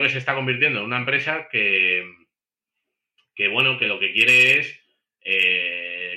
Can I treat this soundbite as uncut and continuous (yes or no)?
yes